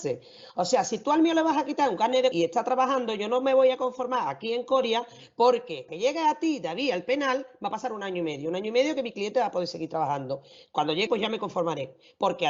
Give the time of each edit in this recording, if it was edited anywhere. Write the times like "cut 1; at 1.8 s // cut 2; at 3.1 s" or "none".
cut 1; at 2.3 s // cut 2; at 5.9 s // cut 3; at 11.1 s